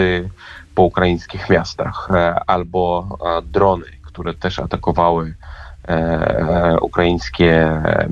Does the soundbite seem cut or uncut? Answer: uncut